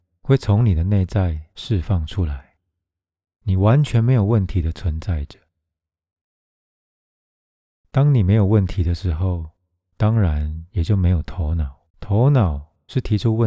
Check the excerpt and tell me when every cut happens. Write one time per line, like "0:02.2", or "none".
0:11.9